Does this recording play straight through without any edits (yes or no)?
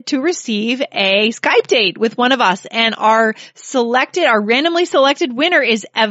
yes